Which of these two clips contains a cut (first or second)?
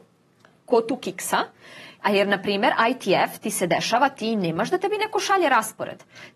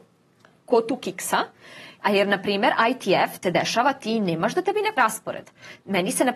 second